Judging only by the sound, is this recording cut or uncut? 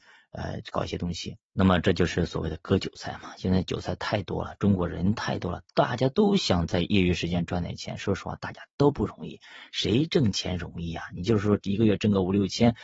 cut